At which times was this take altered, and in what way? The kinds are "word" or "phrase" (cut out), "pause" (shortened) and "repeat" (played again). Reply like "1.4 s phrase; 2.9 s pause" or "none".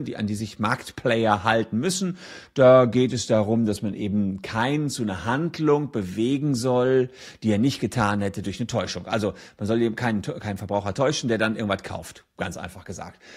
none